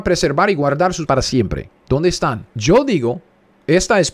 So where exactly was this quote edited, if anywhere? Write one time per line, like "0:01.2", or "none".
0:01.1
0:02.5